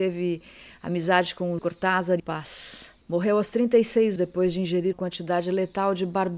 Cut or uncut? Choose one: cut